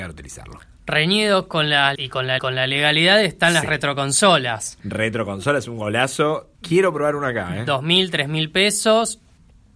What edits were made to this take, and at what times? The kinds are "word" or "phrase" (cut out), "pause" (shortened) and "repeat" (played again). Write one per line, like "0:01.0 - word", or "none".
0:02.0 - word
0:02.4 - repeat
0:06.5 - pause

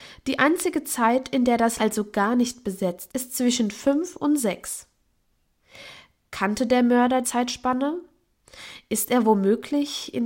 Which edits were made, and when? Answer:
0:01.8 - word
0:03.1 - word
0:07.2 - word

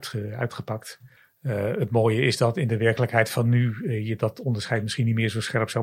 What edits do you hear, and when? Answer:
0:01.2 - pause

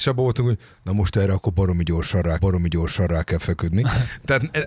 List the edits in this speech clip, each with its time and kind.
0:02.4 - repeat

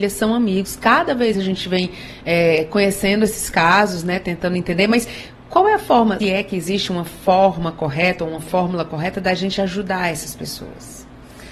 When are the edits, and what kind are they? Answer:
0:01.3 - word
0:06.2 - word

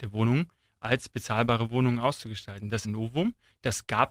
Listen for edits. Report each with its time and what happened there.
0:02.8 - phrase

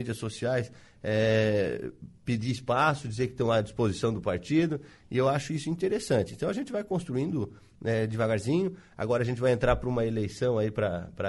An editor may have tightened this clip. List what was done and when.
none

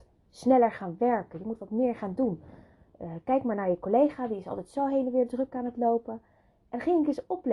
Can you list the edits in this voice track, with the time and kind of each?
none

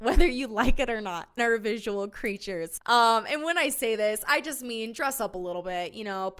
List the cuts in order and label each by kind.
0:01.4 - word

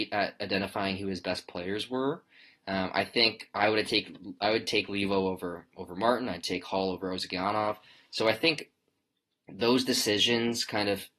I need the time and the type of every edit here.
none

